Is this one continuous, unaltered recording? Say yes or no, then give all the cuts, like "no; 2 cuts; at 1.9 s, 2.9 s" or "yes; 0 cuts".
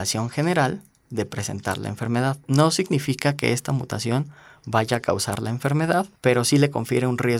yes; 0 cuts